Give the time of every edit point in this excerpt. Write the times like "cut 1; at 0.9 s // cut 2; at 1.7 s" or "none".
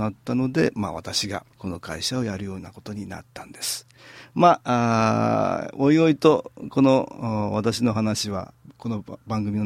cut 1; at 1.5 s